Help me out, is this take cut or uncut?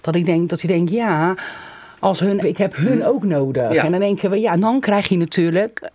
cut